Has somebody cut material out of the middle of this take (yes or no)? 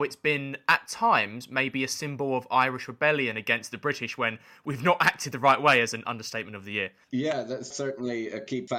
no